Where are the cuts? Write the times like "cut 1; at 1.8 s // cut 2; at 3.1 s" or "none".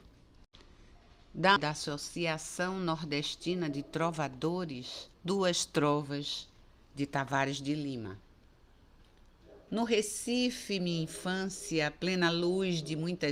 cut 1; at 1.6 s // cut 2; at 5.1 s